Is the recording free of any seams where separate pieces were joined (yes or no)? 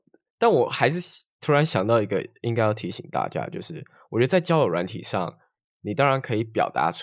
yes